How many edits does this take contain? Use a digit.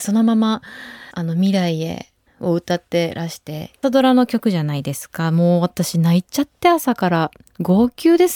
3